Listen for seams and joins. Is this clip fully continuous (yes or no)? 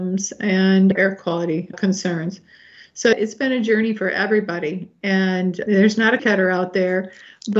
no